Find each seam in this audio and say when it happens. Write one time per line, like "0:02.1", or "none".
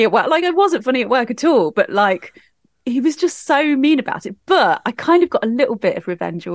none